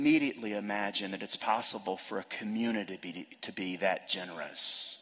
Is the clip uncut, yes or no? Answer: yes